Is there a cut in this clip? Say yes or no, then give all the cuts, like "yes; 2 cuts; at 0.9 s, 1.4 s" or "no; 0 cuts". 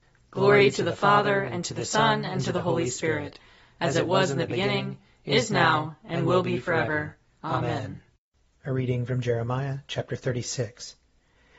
no; 0 cuts